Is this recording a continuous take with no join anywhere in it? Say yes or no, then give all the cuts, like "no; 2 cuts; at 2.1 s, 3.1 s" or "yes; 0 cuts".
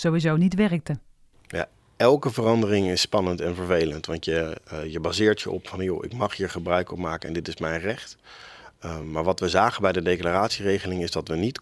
yes; 0 cuts